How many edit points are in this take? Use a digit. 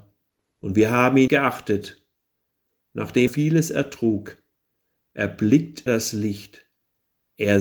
3